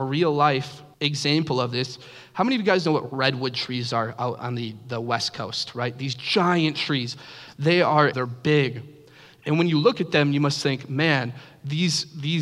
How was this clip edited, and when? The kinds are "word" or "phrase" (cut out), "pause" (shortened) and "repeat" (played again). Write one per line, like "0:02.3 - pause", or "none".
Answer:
0:00.9 - pause
0:08.1 - word